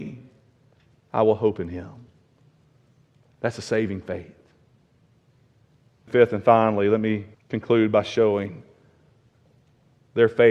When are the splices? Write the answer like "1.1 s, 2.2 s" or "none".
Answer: 6.1 s, 7.3 s